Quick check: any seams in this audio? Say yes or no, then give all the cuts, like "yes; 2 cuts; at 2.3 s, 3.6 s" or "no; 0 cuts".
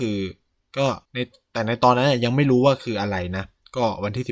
yes; 1 cut; at 1.0 s